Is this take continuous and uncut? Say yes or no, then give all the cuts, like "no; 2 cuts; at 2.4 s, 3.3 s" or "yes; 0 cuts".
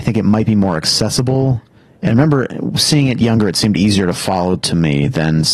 yes; 0 cuts